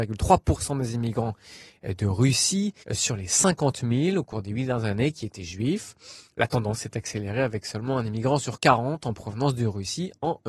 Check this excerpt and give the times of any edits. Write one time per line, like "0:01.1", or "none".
0:02.8

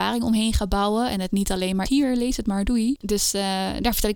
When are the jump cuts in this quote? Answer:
0:01.9

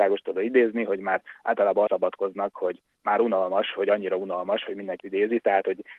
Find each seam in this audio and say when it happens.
0:01.9
0:05.0

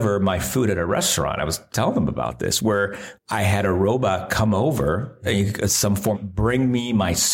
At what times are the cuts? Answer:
0:01.7
0:03.1
0:06.1

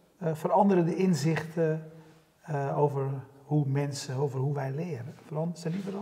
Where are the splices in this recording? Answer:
none

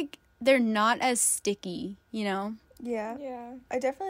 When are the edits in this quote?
none

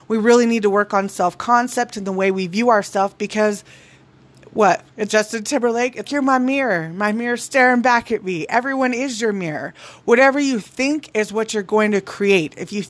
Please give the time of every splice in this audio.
0:05.1
0:06.0

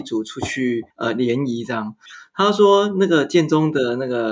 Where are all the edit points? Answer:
0:00.9

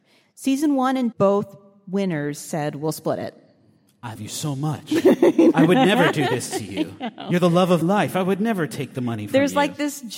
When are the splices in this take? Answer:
0:01.1
0:04.2
0:07.8

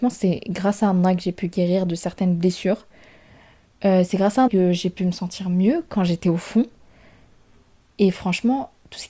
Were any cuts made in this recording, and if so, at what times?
0:04.5

